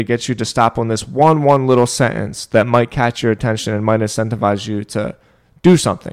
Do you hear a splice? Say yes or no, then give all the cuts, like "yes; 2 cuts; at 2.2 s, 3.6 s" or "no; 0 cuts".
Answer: no; 0 cuts